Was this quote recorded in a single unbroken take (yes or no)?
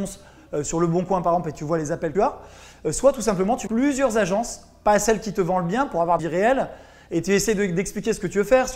no